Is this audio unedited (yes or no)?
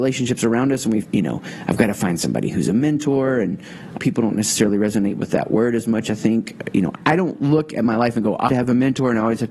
no